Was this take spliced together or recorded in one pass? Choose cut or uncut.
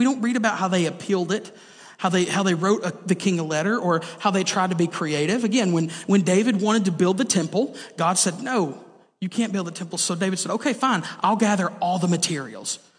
uncut